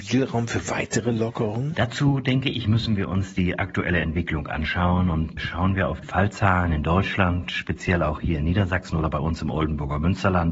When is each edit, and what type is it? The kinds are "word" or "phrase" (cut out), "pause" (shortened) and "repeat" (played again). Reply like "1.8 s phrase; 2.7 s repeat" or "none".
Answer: 6.0 s word